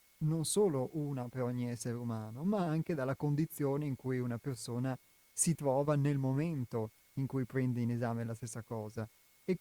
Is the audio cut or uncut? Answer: uncut